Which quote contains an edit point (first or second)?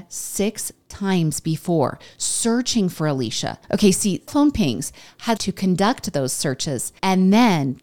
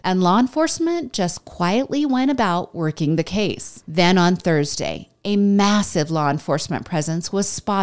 first